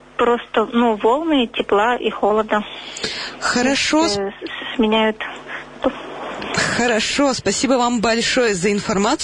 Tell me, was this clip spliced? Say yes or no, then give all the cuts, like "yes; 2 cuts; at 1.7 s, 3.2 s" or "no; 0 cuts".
no; 0 cuts